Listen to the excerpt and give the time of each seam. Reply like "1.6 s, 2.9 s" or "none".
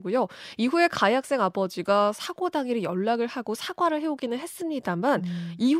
none